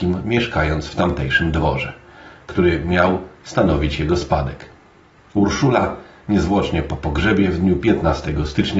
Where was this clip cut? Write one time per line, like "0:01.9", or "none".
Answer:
none

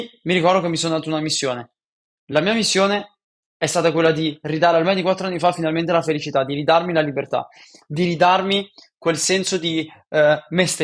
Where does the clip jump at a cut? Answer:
none

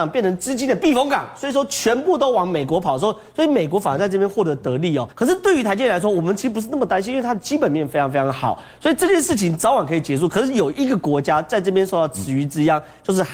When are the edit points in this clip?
0:05.1

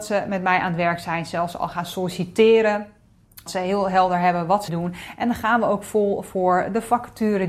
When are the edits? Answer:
0:03.5
0:04.7

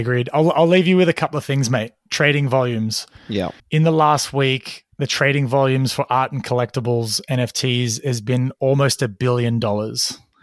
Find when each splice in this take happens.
0:03.6
0:04.9

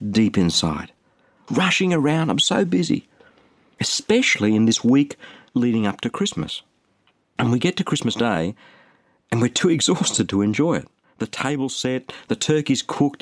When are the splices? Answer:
none

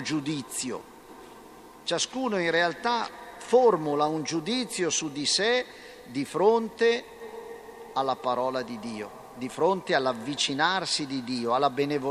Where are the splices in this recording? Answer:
none

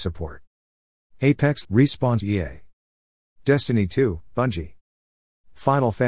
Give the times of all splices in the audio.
0:01.6
0:02.2

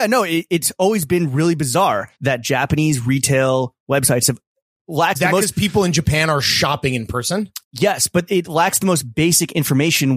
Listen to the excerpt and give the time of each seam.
0:02.2
0:05.2
0:07.6

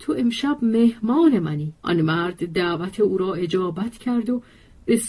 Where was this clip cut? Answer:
0:01.8

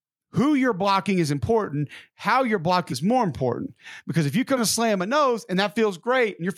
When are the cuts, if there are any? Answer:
0:02.9
0:04.6

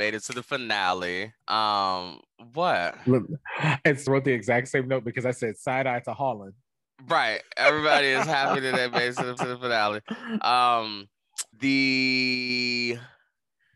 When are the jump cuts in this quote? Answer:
0:01.4
0:04.1
0:09.4
0:11.5

